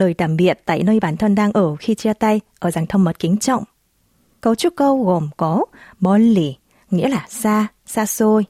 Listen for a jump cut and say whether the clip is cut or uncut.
uncut